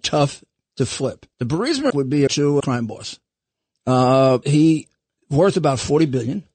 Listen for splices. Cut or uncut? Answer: cut